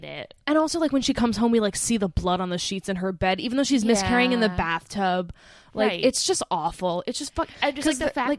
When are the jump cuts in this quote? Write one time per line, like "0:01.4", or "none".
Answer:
none